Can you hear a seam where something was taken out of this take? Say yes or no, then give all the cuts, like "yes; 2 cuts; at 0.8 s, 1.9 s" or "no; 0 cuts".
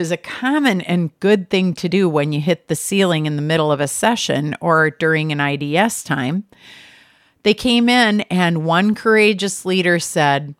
no; 0 cuts